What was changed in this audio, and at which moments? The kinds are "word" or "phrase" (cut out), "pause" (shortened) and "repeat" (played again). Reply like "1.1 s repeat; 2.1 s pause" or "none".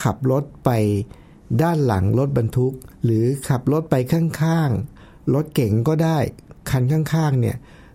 2.9 s pause